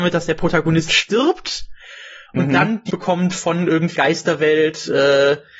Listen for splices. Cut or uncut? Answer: cut